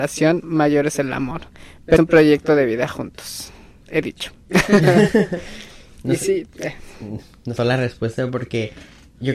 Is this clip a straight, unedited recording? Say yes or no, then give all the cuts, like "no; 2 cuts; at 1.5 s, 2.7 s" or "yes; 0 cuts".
no; 2 cuts; at 2.0 s, 7.6 s